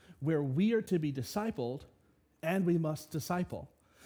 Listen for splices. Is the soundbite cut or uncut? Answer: uncut